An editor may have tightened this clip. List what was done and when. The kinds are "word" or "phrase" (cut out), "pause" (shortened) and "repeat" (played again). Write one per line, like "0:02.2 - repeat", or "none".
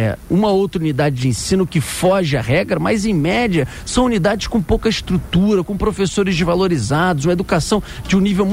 none